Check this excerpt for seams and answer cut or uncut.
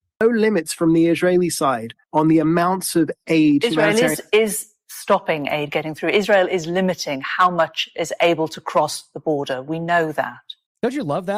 cut